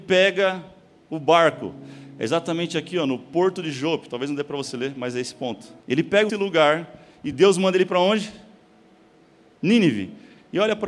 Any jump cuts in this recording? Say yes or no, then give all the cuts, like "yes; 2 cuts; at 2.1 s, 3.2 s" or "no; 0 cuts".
yes; 2 cuts; at 5.8 s, 6.3 s